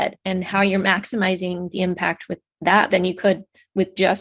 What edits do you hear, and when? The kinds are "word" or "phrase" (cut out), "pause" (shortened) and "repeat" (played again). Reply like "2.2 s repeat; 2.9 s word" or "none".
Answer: 2.9 s word